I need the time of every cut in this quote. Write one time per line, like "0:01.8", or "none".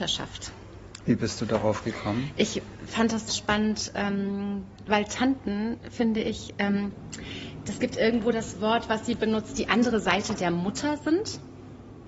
0:03.3